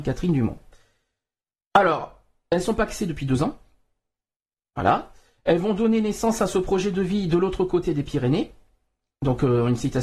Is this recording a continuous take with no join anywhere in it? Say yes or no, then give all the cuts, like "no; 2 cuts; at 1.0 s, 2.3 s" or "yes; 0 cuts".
yes; 0 cuts